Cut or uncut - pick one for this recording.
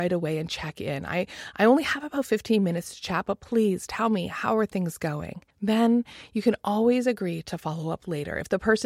cut